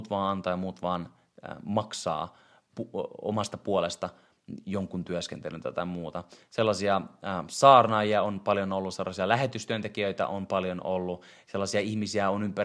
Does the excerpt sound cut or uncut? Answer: uncut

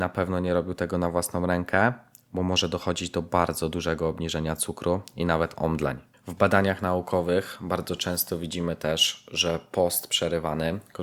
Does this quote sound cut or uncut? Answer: uncut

